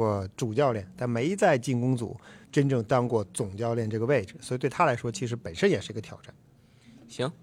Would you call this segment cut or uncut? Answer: cut